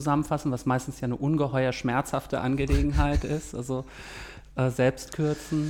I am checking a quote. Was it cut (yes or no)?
no